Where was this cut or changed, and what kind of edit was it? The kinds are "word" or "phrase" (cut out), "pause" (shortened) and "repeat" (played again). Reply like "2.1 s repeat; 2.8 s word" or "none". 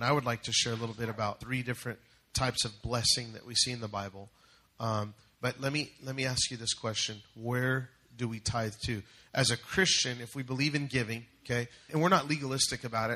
1.4 s word; 11.9 s word